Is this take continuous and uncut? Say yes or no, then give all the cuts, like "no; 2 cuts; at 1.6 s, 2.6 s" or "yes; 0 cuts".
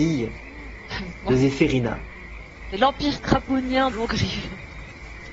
no; 1 cut; at 3.9 s